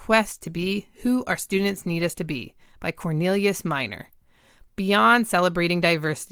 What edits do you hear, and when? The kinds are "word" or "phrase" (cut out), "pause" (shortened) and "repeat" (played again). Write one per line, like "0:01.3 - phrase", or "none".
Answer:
none